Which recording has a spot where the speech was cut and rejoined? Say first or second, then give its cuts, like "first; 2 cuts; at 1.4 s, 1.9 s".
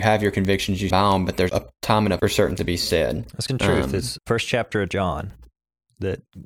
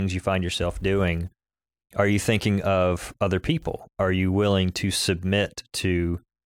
first; 6 cuts; at 0.9 s, 1.5 s, 2.2 s, 2.6 s, 3.5 s, 4.2 s